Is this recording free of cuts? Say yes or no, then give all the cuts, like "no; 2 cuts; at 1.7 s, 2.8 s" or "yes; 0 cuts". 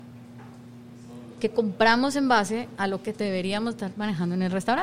yes; 0 cuts